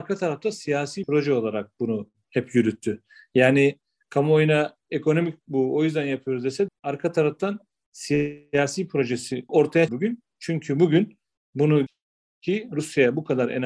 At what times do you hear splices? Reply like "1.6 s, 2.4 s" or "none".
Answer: 1.0 s, 6.7 s, 9.5 s, 9.9 s, 11.9 s